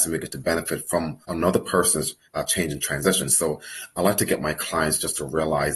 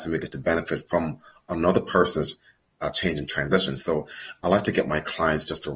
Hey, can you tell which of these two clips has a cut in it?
first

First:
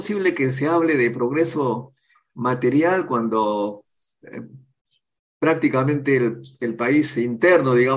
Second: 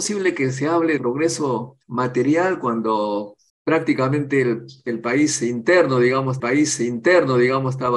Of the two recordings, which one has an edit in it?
second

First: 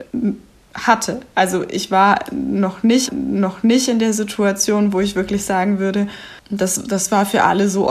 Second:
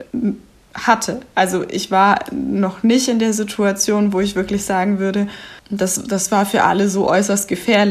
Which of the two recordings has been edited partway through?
first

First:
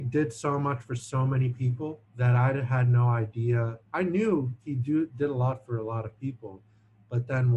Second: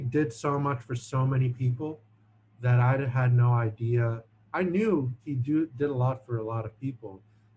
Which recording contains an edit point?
first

